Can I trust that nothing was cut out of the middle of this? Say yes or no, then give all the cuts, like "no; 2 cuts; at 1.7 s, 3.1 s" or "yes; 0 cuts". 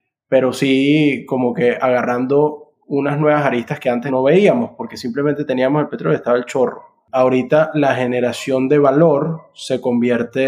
yes; 0 cuts